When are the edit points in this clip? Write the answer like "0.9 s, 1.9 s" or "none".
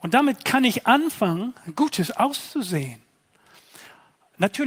none